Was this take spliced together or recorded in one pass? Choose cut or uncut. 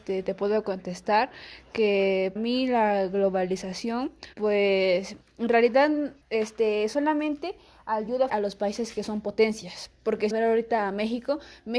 cut